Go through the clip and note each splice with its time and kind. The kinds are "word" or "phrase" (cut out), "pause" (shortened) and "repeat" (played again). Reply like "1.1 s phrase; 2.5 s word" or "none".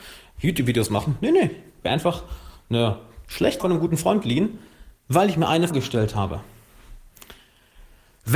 1.8 s word; 3.6 s word; 5.7 s word